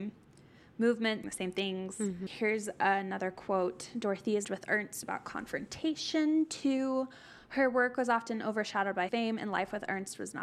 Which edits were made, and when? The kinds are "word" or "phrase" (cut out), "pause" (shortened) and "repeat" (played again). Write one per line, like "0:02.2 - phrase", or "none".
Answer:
0:01.2 - phrase
0:04.4 - word
0:05.0 - word
0:09.1 - word